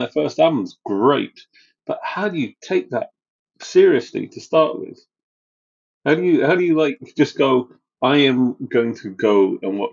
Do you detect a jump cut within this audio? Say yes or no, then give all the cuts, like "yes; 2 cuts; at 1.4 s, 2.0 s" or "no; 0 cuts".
no; 0 cuts